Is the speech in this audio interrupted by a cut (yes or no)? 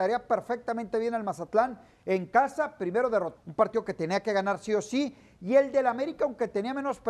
yes